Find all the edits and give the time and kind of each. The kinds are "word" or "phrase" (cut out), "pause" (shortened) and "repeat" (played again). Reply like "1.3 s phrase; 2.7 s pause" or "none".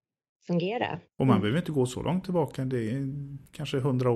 1.1 s pause